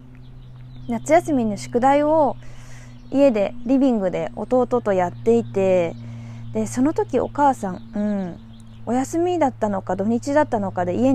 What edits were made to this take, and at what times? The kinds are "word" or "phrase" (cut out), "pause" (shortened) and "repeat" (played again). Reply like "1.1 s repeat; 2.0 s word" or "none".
none